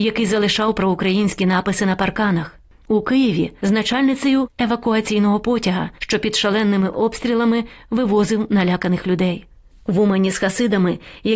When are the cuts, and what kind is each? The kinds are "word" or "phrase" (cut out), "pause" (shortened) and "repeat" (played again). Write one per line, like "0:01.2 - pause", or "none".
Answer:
none